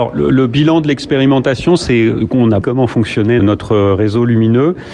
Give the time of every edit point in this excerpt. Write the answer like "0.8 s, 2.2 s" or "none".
2.6 s, 3.4 s